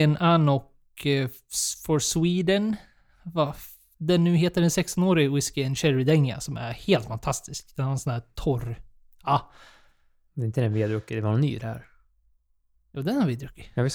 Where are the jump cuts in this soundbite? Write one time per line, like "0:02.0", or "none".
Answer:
none